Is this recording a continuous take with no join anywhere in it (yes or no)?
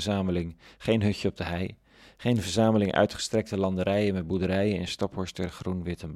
yes